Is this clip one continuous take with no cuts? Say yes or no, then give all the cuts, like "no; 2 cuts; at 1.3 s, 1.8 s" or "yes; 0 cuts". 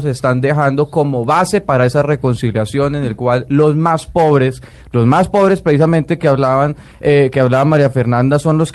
yes; 0 cuts